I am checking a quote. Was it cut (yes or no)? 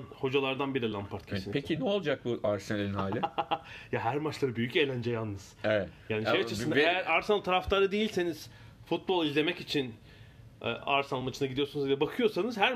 no